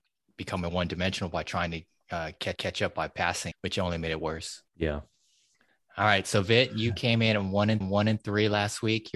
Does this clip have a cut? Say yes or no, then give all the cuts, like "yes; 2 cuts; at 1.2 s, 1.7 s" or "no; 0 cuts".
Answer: yes; 4 cuts; at 2.6 s, 3.5 s, 4.7 s, 7.8 s